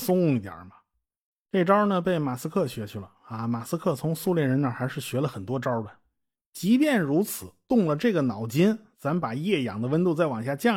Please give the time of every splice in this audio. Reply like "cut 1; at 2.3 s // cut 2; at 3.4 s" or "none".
none